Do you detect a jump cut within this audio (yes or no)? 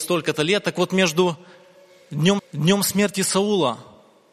yes